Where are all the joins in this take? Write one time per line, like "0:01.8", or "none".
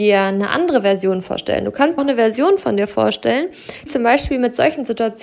0:02.0
0:03.9